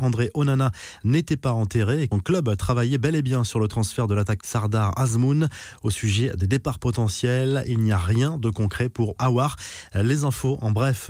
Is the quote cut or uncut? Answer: cut